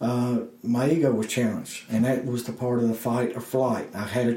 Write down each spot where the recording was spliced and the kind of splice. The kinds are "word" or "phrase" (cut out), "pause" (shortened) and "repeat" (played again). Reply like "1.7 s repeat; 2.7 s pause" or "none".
none

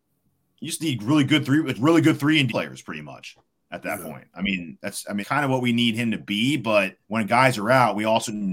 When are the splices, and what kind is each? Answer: 1.7 s word; 2.5 s word; 3.6 s pause; 5.2 s phrase; 7.0 s pause

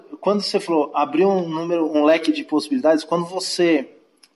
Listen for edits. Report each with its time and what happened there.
none

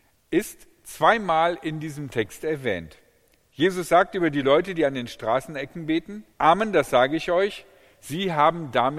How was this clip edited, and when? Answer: 6.3 s pause

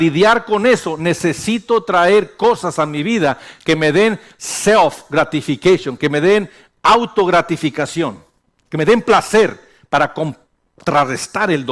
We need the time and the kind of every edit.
none

